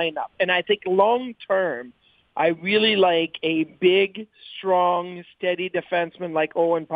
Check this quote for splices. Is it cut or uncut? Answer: uncut